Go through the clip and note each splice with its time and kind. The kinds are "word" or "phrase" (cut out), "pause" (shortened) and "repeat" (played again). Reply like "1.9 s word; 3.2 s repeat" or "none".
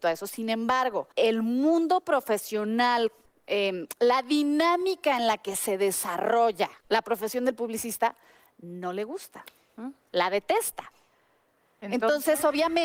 1.1 s pause; 3.3 s pause; 6.8 s pause; 10.0 s pause